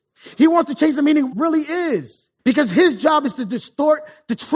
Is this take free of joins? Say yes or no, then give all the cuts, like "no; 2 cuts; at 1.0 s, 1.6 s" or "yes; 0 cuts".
no; 2 cuts; at 1.3 s, 2.4 s